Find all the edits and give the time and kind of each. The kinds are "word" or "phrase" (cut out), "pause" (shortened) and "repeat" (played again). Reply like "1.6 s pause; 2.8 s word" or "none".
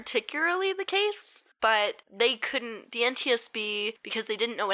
none